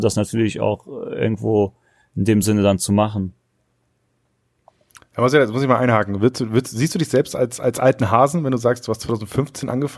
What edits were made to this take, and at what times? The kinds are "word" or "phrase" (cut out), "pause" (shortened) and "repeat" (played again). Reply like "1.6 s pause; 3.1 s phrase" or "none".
none

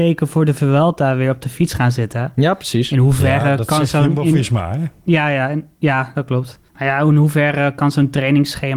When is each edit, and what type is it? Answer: 6.7 s pause

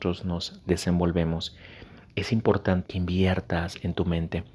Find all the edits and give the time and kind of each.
2.8 s word

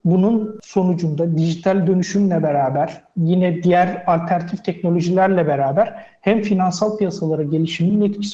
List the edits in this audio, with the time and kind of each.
none

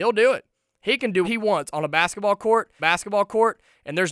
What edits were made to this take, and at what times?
1.2 s word; 2.8 s repeat

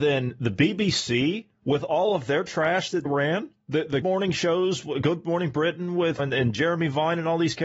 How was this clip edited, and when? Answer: 3.1 s word; 4.0 s word; 6.2 s phrase

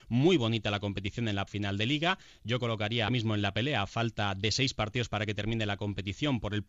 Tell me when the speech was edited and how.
1.5 s word; 3.1 s word

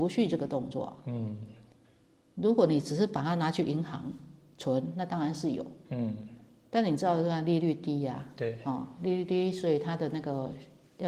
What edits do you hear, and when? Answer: none

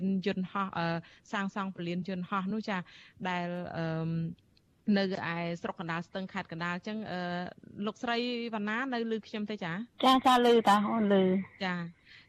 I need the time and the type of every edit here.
9.9 s pause

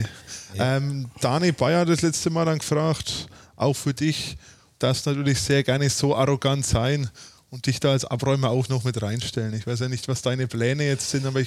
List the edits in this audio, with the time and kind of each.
none

